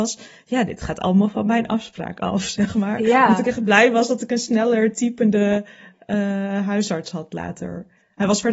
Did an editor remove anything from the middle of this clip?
no; 0 cuts

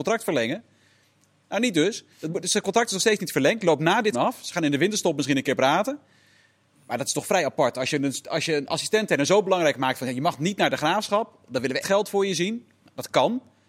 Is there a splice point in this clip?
yes; 3 cuts; at 2.1 s, 4.1 s, 11.8 s

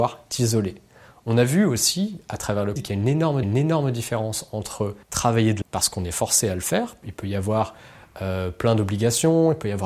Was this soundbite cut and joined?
yes; 5 cuts; at 2.8 s, 3.4 s, 5.0 s, 5.6 s, 7.0 s

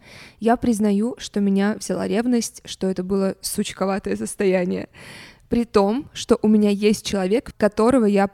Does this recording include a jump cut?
no; 0 cuts

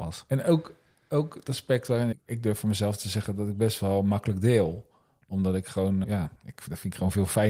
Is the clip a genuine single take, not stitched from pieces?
no; 3 cuts; at 2.1 s, 6.0 s, 6.4 s

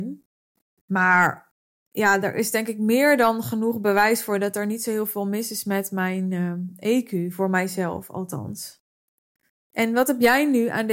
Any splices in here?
no; 0 cuts

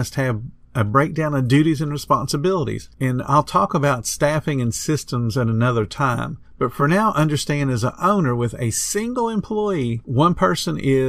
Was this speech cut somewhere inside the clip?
no; 0 cuts

